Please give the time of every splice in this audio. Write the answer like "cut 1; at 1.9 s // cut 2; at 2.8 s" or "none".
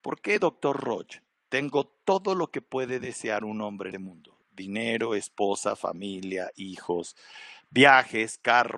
cut 1; at 1.4 s // cut 2; at 3.9 s